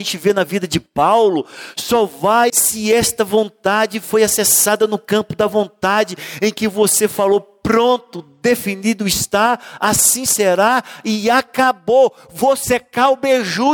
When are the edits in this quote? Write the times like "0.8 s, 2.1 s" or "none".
2.5 s